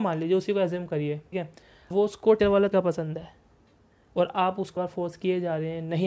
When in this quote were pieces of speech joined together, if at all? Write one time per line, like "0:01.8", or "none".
0:01.3
0:01.9
0:02.4
0:02.7
0:04.8